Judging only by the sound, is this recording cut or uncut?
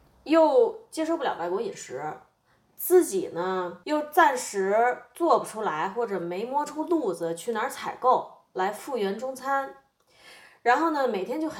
uncut